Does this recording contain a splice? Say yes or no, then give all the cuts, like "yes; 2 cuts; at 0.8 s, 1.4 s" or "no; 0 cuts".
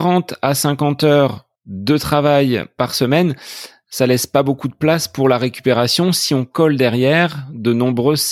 yes; 1 cut; at 1.5 s